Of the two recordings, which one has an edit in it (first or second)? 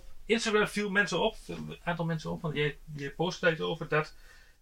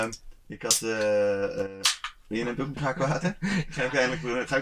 second